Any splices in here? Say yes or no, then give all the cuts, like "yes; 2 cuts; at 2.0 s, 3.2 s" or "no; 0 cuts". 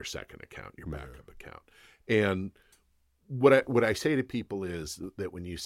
no; 0 cuts